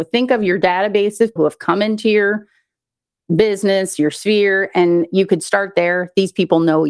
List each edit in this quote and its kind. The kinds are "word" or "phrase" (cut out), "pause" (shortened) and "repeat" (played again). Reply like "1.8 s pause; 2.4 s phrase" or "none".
1.4 s word